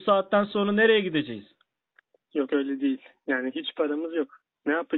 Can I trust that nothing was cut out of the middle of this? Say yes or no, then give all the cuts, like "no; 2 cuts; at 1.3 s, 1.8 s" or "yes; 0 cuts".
yes; 0 cuts